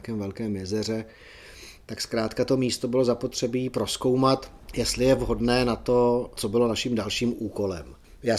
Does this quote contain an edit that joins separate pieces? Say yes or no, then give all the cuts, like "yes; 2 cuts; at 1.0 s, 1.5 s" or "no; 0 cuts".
no; 0 cuts